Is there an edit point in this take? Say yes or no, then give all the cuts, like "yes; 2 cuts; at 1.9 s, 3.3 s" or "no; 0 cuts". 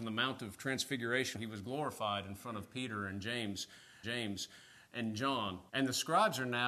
yes; 3 cuts; at 1.4 s, 4.0 s, 5.7 s